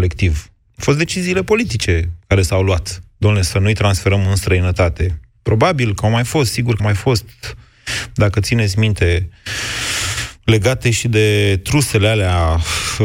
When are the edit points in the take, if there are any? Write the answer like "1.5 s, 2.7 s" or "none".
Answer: 6.8 s

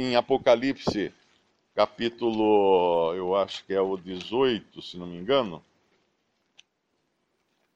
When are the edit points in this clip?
none

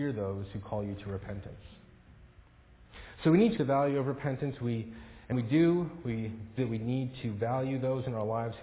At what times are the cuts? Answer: 3.6 s, 5.3 s, 6.6 s

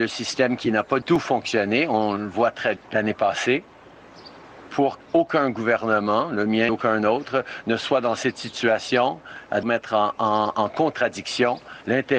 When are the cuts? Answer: 1.0 s, 2.8 s, 5.0 s, 6.7 s, 9.6 s

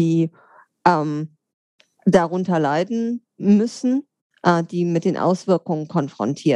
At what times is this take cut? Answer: none

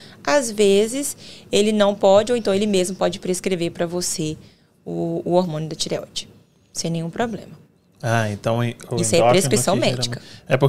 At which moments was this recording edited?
none

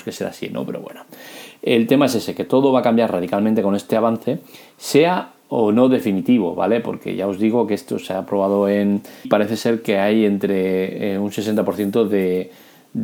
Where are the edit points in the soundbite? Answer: 9.2 s

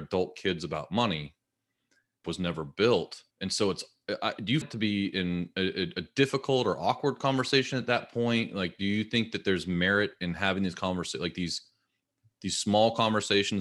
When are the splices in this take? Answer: 2.2 s, 3.3 s, 4.6 s

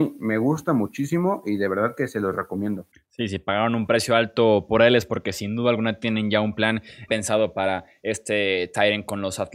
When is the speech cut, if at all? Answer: 2.9 s, 7.1 s

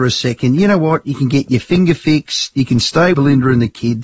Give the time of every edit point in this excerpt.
3.1 s

